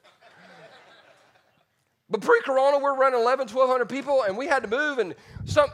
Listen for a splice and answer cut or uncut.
uncut